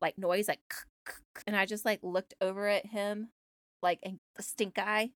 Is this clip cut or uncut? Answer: cut